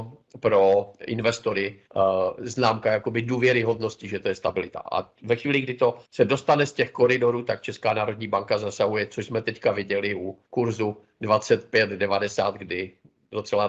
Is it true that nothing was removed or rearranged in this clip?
no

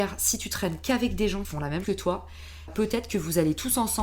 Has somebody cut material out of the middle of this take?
yes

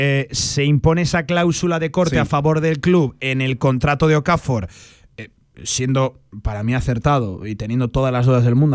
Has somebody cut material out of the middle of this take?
no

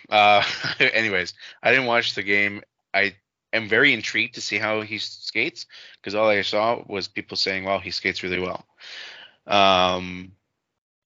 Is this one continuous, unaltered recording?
yes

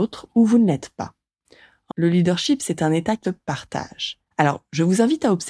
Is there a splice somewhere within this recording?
yes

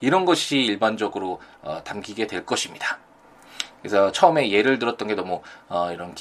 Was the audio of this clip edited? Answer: no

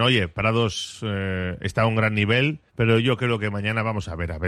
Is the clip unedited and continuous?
no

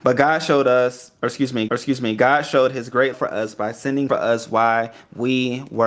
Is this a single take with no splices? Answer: no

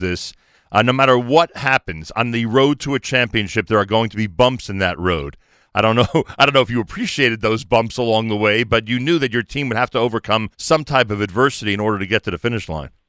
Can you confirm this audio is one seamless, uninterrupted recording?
no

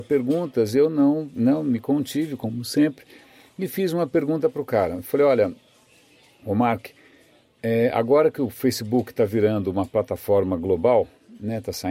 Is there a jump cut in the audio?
no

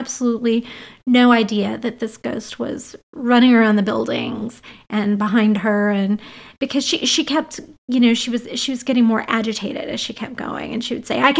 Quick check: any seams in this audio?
no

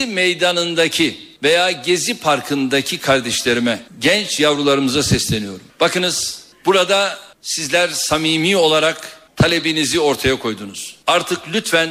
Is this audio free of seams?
yes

